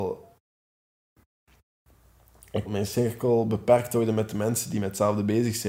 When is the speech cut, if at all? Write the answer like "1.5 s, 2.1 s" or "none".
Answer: 2.7 s